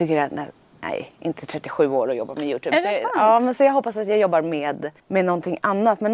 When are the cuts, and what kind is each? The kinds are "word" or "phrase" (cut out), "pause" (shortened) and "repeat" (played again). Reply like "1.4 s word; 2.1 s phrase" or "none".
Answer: 5.0 s pause